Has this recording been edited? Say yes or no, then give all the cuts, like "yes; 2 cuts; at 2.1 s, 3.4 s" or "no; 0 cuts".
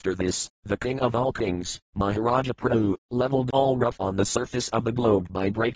yes; 1 cut; at 4.0 s